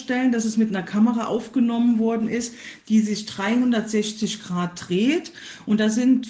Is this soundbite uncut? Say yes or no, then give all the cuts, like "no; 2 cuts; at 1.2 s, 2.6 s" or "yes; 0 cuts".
yes; 0 cuts